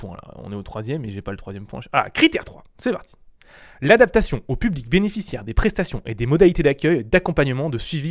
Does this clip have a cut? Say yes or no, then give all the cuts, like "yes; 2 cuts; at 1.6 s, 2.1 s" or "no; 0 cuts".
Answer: no; 0 cuts